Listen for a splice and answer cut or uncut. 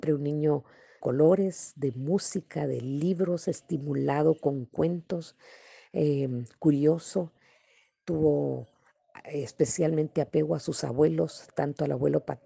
cut